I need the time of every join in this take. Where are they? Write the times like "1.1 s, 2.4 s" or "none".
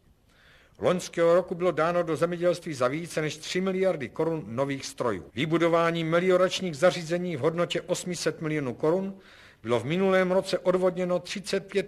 5.3 s